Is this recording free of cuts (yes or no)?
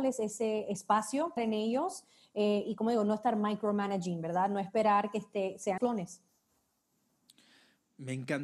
no